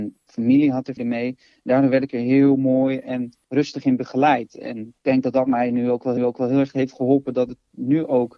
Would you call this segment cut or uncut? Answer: cut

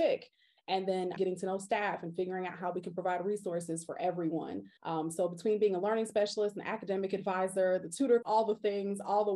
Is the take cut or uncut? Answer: cut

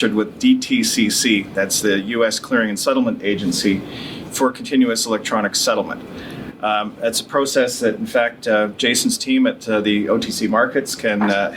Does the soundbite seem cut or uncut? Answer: uncut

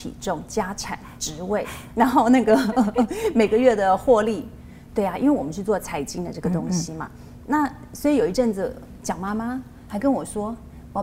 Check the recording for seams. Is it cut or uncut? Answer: uncut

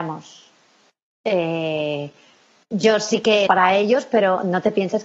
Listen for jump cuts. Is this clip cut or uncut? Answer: cut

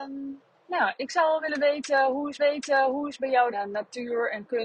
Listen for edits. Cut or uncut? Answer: cut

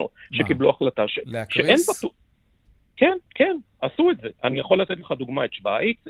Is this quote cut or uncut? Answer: cut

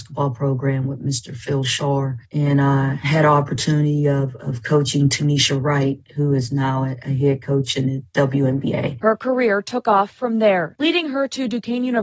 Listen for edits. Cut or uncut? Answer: uncut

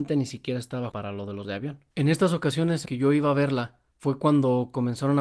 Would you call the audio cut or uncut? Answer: cut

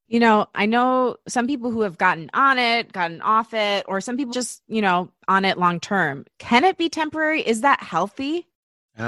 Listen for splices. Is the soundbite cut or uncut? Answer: cut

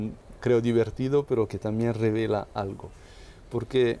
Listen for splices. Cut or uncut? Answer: uncut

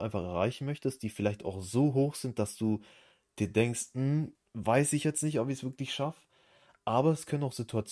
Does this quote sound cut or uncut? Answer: cut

